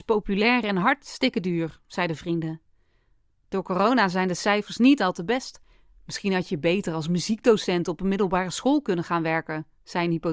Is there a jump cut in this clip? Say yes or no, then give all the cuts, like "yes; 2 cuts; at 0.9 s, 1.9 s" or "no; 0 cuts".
no; 0 cuts